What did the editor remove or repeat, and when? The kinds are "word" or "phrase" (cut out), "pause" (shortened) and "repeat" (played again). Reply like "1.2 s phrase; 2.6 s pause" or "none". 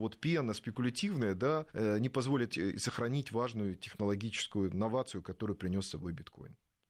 1.7 s pause; 2.5 s word